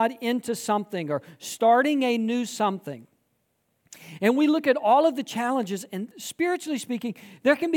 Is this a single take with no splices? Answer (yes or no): no